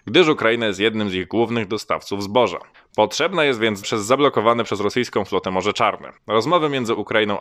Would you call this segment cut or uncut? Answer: cut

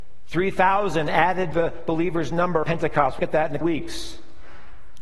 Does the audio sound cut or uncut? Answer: cut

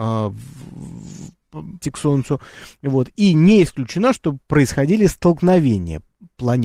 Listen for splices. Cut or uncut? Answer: cut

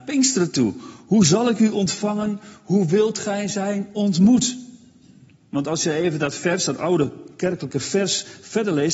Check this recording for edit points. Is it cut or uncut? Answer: uncut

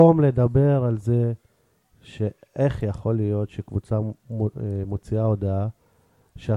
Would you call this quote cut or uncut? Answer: uncut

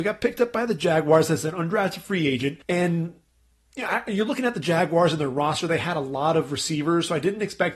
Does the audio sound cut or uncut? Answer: cut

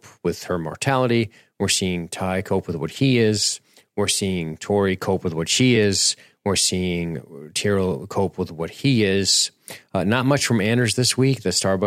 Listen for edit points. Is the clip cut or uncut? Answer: uncut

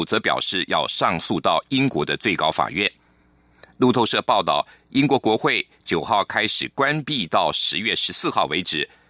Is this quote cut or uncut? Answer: uncut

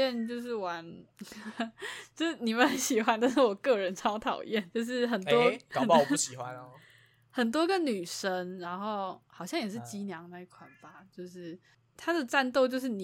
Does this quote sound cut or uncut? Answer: cut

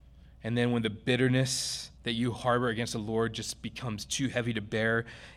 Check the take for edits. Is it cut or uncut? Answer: cut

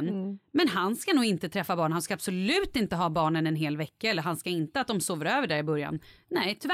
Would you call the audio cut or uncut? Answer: uncut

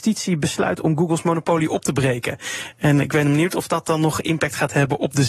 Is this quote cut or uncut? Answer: uncut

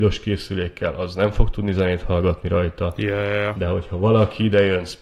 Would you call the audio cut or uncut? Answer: uncut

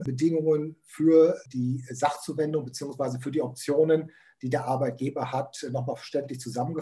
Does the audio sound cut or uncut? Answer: uncut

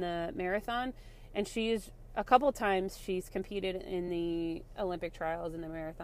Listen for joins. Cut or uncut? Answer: uncut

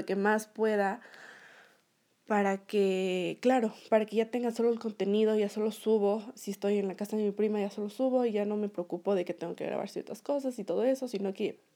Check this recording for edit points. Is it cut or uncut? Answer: uncut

